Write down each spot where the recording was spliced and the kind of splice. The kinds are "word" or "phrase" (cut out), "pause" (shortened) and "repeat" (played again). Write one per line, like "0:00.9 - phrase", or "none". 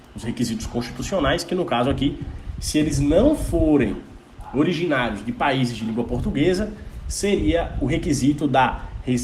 none